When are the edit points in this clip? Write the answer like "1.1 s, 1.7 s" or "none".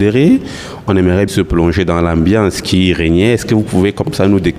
1.3 s